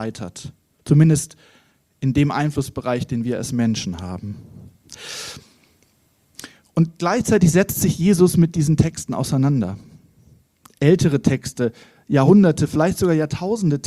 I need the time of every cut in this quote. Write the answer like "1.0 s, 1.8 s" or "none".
none

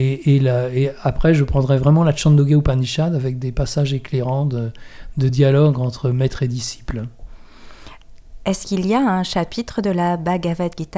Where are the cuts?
none

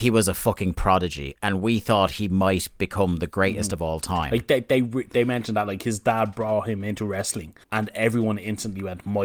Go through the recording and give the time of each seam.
7.6 s

